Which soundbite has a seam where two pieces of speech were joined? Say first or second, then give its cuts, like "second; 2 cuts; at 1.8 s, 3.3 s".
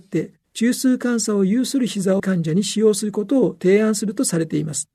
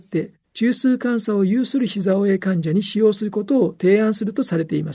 first; 1 cut; at 2.2 s